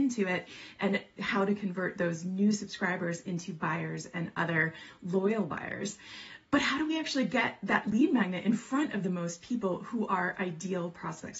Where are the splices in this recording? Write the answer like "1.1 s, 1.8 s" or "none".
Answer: 6.5 s